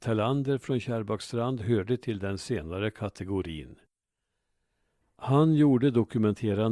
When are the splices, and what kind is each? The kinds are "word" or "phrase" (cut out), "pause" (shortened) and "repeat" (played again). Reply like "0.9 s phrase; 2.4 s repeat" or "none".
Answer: none